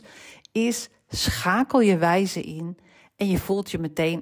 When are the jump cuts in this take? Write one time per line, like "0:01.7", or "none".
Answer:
none